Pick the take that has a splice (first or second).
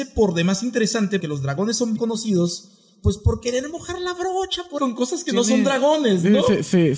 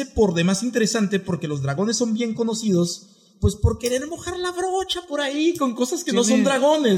first